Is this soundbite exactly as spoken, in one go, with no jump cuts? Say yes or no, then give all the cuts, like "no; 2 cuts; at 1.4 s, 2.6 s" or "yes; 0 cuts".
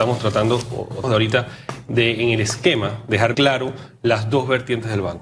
no; 2 cuts; at 1.0 s, 3.3 s